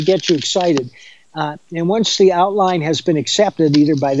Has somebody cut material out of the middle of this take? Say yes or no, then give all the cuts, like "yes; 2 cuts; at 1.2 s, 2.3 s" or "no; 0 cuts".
no; 0 cuts